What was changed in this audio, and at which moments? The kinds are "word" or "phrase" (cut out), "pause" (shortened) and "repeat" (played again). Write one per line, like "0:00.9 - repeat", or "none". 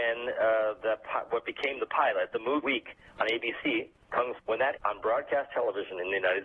0:02.6 - phrase
0:04.4 - word
0:04.8 - word